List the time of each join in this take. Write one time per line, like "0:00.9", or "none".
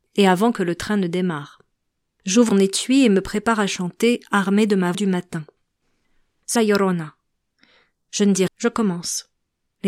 0:02.5
0:04.9
0:06.6
0:08.5